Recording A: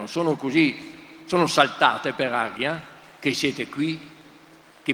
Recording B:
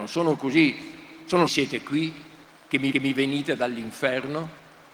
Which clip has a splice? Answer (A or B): B